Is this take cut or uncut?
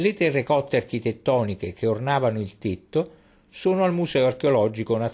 uncut